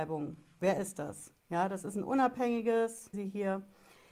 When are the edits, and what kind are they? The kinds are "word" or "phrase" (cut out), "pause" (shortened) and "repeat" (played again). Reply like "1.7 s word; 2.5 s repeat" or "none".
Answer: 1.4 s pause; 3.1 s word